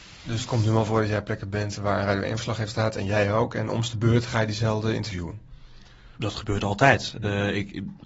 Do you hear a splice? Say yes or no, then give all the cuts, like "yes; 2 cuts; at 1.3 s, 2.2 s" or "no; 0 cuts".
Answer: yes; 1 cut; at 6.1 s